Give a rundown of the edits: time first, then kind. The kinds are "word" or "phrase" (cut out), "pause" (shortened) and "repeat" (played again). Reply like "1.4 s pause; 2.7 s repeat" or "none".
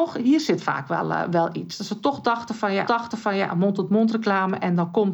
2.8 s repeat